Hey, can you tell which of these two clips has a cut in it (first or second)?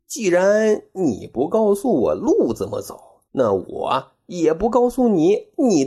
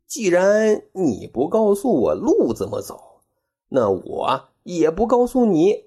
first